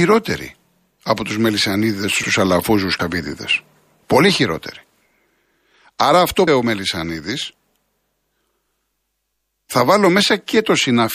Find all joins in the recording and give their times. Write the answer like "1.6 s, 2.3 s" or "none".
2.2 s, 3.0 s, 6.5 s